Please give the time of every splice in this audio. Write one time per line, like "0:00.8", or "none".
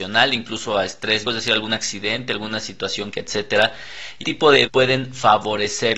0:01.2
0:03.1
0:04.2
0:04.6